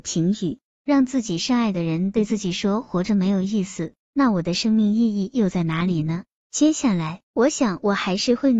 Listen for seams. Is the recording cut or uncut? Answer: cut